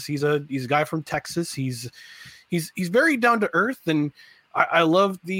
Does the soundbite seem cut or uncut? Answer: uncut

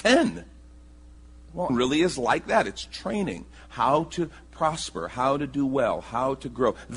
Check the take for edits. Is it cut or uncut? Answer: cut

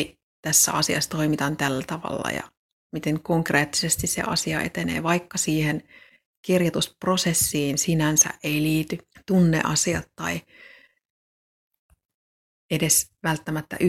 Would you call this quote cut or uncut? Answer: cut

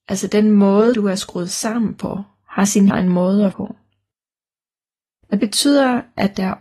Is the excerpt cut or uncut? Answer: cut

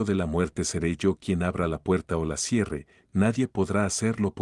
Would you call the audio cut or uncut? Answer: uncut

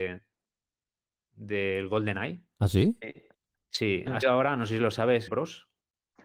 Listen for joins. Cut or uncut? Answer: cut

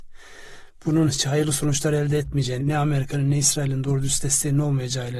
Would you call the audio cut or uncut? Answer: cut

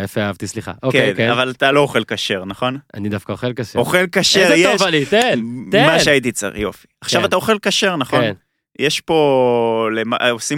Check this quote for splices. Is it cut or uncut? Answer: uncut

